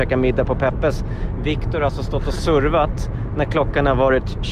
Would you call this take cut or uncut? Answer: uncut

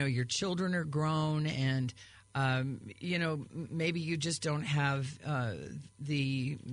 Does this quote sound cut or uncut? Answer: uncut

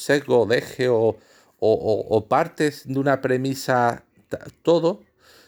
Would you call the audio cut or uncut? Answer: uncut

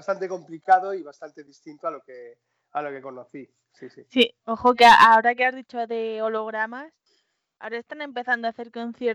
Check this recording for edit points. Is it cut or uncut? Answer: uncut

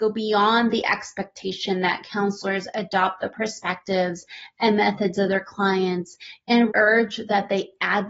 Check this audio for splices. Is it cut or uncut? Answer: cut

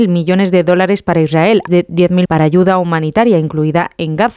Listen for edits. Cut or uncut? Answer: cut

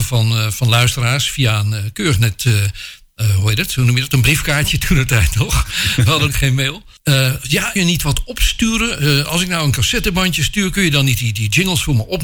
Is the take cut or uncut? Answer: cut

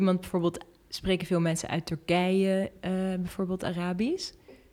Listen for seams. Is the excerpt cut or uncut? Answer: uncut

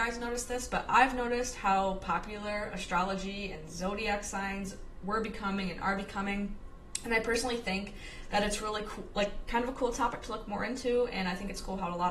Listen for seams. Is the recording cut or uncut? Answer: uncut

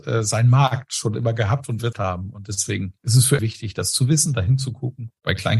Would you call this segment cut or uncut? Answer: cut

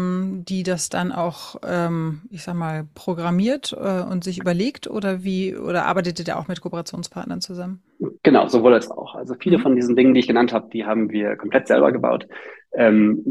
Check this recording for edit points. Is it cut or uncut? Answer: cut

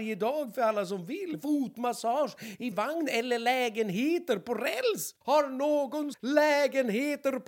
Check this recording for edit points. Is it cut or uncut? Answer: cut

